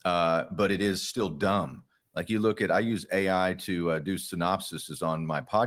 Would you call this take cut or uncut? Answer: uncut